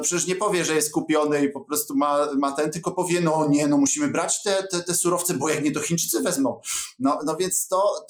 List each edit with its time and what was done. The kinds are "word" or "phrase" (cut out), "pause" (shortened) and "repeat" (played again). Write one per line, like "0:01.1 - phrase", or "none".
none

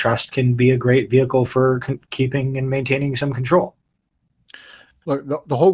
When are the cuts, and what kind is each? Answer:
none

